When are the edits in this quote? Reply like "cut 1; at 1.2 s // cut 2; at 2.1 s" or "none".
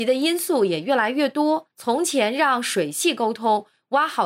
cut 1; at 1.7 s